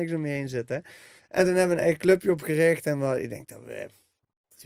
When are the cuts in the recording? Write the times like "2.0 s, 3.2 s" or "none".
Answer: 1.2 s

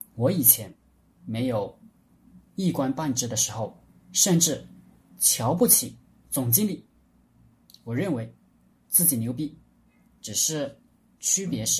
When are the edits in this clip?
none

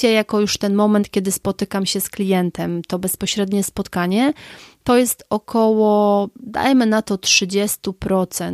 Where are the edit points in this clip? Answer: none

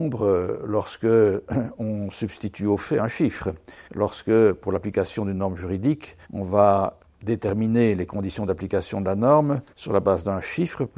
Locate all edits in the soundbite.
3.8 s, 6.2 s, 9.7 s

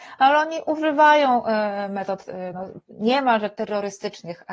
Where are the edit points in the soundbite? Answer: none

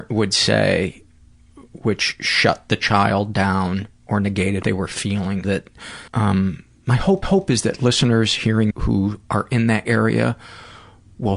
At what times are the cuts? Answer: 4.6 s, 5.4 s, 6.1 s, 7.2 s, 8.7 s, 9.8 s

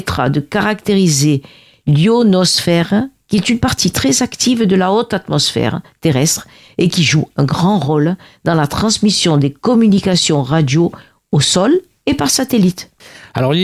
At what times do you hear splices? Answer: none

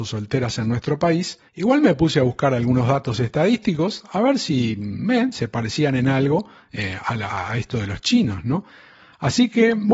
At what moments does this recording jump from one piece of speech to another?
1.5 s

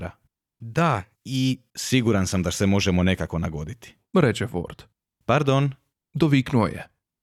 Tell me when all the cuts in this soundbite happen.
4.9 s

